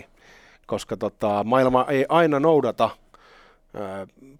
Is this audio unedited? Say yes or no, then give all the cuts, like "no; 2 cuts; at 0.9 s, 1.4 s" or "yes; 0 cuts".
yes; 0 cuts